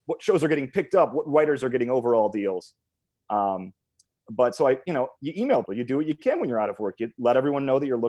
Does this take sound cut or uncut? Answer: cut